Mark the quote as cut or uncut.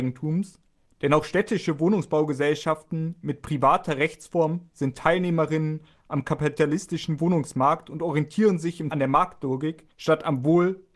cut